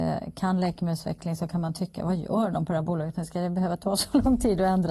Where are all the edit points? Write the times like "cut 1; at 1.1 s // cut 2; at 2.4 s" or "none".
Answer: none